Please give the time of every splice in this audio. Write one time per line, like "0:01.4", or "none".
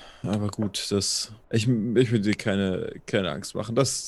0:01.4